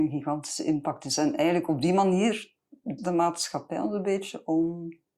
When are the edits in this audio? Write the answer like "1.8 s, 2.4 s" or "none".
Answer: 3.0 s